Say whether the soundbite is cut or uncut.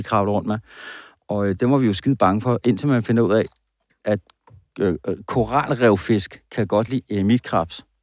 uncut